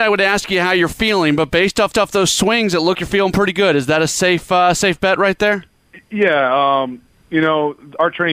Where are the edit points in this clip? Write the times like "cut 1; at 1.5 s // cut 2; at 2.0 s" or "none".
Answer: cut 1; at 1.9 s // cut 2; at 2.9 s